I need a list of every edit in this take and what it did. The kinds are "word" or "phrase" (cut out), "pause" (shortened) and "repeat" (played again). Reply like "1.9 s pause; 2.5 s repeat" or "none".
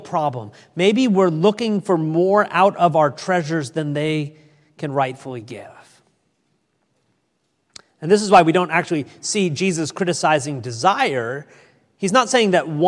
none